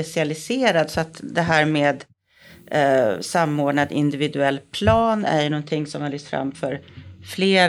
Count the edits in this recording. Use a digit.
0